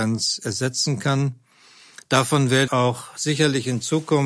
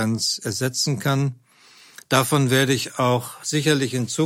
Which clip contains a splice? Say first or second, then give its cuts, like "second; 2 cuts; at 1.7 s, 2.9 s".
first; 1 cut; at 2.7 s